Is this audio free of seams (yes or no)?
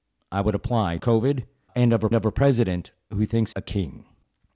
no